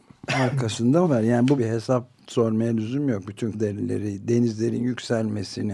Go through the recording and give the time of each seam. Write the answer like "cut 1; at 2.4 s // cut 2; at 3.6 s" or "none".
cut 1; at 1.0 s // cut 2; at 1.6 s // cut 3; at 2.2 s // cut 4; at 3.5 s